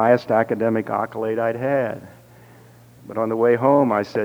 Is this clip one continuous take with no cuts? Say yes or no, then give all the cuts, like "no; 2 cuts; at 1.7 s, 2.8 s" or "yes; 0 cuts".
yes; 0 cuts